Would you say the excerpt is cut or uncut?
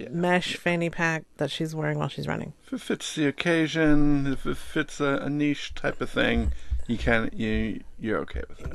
cut